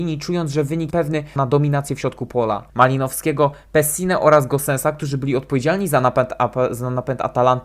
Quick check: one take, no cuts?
no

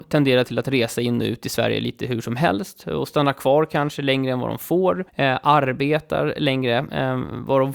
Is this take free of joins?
no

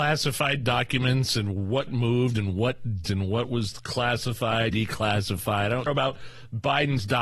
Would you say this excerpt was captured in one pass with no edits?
no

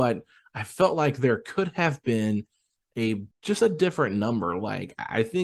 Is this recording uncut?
no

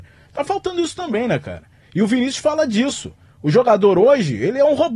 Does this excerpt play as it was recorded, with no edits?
yes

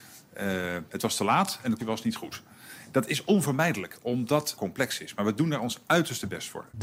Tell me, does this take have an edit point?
yes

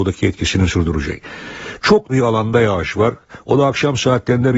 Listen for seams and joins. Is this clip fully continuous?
no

